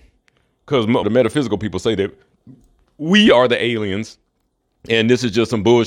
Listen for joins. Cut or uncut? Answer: cut